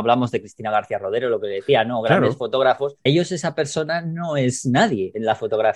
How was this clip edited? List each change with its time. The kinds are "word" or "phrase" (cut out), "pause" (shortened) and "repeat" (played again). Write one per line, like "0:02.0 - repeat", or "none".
0:03.1 - word